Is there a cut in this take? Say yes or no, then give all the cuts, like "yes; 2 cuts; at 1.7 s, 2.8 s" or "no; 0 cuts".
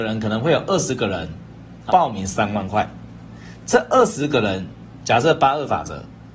yes; 1 cut; at 1.9 s